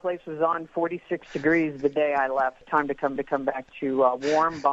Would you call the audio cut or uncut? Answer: cut